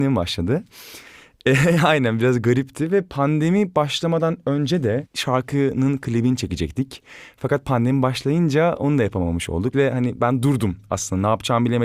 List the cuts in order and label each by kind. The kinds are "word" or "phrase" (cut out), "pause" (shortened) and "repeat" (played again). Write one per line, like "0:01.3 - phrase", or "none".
none